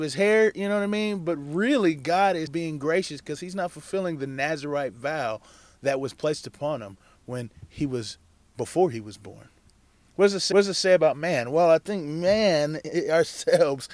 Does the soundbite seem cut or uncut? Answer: cut